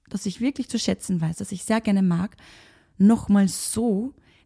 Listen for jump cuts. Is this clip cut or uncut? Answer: uncut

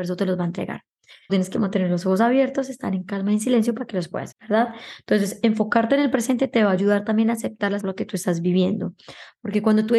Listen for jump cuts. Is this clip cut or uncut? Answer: cut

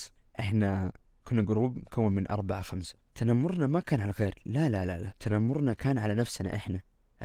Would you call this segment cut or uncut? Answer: uncut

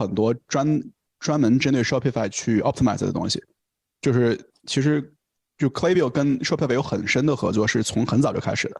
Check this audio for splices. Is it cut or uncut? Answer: uncut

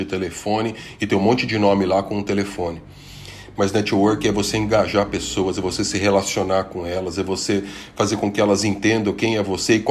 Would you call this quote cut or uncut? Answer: uncut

